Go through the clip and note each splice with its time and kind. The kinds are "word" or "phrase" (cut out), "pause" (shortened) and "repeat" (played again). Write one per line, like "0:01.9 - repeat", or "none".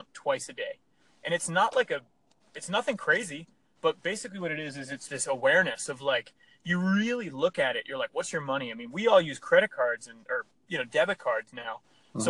none